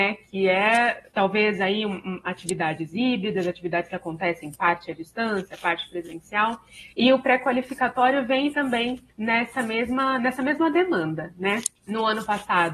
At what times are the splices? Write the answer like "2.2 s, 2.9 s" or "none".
1.1 s, 6.9 s, 9.1 s, 11.8 s